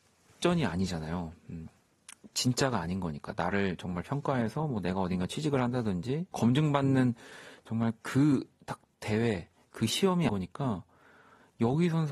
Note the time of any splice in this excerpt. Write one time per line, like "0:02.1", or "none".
0:06.3
0:09.6
0:10.3